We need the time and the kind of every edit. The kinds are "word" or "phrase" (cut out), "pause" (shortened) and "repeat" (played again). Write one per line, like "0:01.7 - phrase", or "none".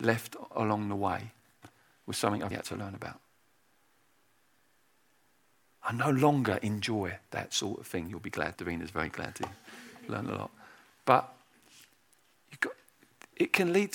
0:02.5 - word
0:08.5 - phrase